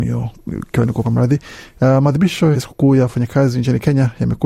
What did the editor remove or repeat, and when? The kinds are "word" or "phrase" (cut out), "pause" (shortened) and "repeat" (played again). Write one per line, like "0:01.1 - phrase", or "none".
0:01.0 - phrase
0:02.5 - word